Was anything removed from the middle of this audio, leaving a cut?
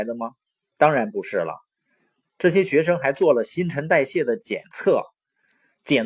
no; 0 cuts

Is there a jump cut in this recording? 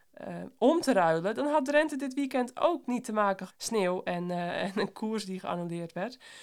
yes; 1 cut; at 3.5 s

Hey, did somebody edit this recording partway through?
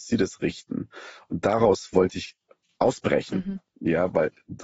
no; 0 cuts

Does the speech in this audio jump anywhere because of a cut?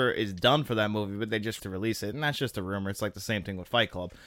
yes; 1 cut; at 1.6 s

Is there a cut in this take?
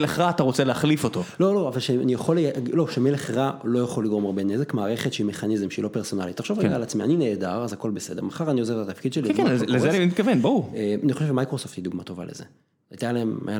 no; 0 cuts

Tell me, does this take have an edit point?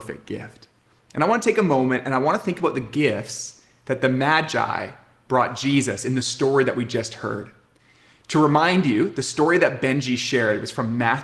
no; 0 cuts

